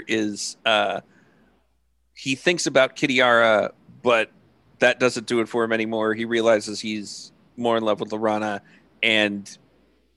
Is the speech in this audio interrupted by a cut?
no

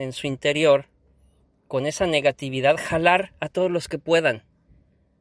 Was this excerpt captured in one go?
yes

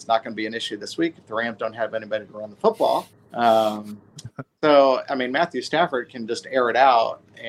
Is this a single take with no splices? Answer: no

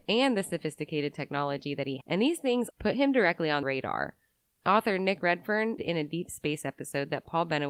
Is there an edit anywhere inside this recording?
yes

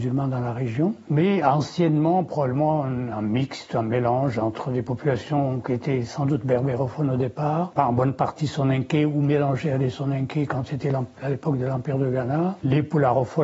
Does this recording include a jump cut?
yes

